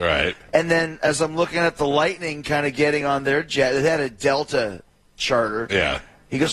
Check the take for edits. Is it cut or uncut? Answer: uncut